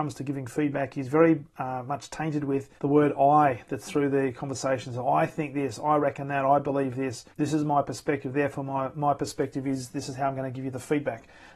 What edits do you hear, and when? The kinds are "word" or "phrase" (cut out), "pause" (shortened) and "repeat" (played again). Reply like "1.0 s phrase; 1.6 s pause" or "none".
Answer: 2.8 s pause; 7.3 s pause